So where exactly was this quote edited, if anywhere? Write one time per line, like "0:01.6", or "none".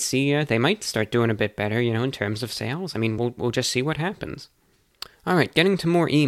none